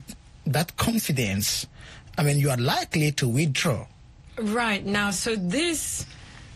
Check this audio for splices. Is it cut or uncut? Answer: uncut